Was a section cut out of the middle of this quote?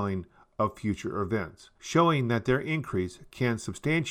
yes; 1 cut; at 1.7 s

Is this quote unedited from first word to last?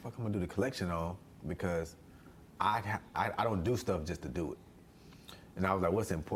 yes; 0 cuts

